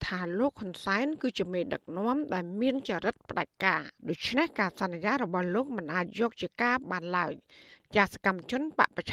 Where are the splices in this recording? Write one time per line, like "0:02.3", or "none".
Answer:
0:04.0